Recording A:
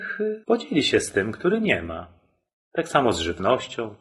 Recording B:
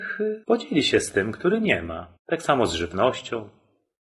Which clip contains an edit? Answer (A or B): B